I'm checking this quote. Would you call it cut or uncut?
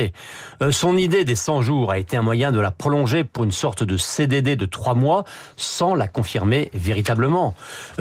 uncut